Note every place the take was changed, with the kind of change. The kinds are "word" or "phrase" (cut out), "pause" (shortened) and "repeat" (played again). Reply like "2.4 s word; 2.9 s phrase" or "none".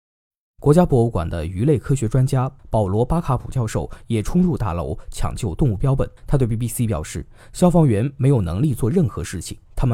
6.2 s pause